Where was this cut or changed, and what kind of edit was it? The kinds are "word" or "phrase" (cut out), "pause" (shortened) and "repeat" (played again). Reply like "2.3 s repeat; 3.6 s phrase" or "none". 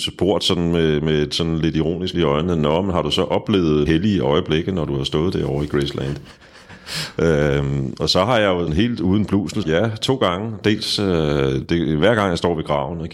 2.1 s word; 3.9 s word; 8.7 s word; 9.6 s word

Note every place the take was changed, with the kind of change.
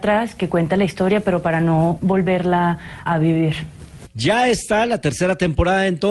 3.1 s word

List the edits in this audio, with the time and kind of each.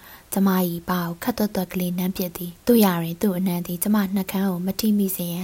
2.6 s pause

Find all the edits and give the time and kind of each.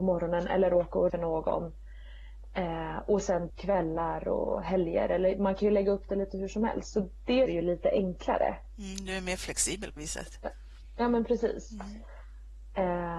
1.1 s phrase; 3.5 s word; 7.5 s word; 10.0 s word

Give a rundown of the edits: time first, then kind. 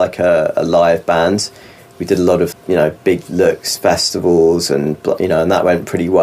2.5 s word

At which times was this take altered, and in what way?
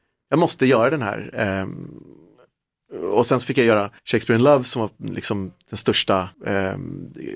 4.0 s pause; 6.3 s pause

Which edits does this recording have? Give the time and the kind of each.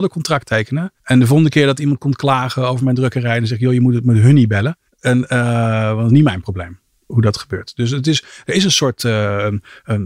1.0 s pause; 4.9 s pause

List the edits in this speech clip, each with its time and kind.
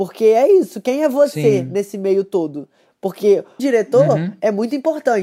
3.6 s word

